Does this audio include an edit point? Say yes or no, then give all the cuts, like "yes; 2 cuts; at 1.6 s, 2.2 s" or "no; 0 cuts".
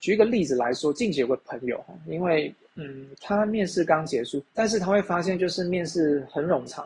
yes; 1 cut; at 4.5 s